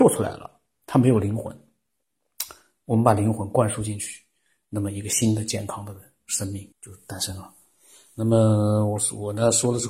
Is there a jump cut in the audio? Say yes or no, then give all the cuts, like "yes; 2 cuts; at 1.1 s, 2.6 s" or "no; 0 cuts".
yes; 1 cut; at 6.7 s